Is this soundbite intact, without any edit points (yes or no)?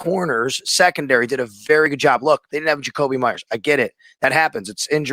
yes